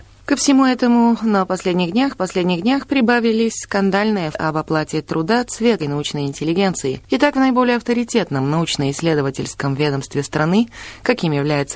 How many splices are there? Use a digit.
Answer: 3